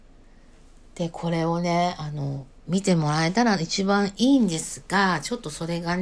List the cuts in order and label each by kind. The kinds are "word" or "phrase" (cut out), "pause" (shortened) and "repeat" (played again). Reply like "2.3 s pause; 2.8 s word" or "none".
2.6 s pause